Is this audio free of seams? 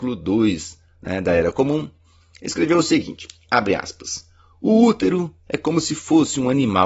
yes; 0 cuts

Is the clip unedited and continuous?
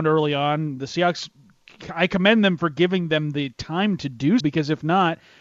no; 1 cut; at 4.4 s

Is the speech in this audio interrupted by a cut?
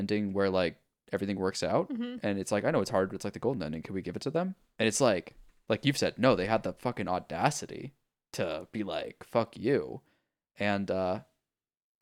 no; 0 cuts

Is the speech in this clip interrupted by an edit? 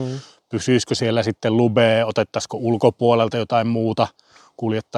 no; 0 cuts

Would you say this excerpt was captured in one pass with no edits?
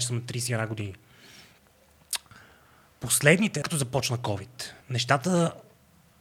no; 2 cuts; at 3.6 s, 4.8 s

